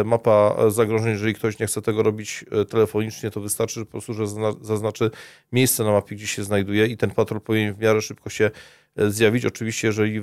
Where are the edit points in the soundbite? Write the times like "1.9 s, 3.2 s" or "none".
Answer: none